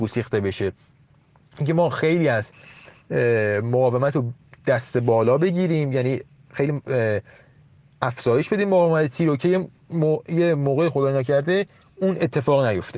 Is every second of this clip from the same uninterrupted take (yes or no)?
yes